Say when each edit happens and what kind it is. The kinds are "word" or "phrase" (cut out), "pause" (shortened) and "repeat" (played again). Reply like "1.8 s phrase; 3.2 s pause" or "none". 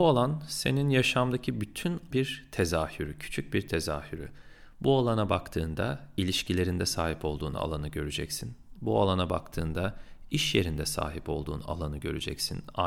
2.1 s word